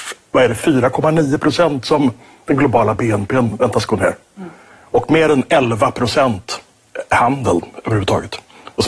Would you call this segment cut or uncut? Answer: uncut